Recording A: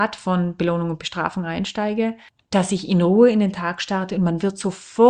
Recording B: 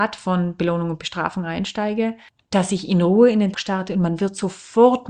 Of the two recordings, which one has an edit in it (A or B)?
B